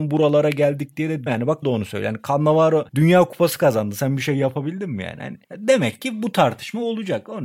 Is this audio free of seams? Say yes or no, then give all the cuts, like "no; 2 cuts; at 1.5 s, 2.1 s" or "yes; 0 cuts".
no; 4 cuts; at 1.3 s, 1.6 s, 2.9 s, 5.4 s